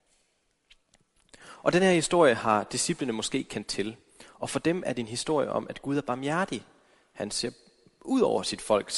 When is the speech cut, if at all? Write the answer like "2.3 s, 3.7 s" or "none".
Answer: none